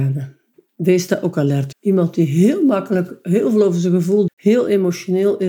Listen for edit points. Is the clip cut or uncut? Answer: cut